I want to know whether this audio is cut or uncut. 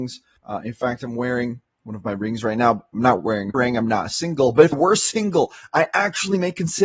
cut